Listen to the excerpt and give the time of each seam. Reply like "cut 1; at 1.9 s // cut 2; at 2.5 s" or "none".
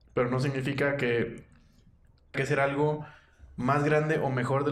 cut 1; at 2.3 s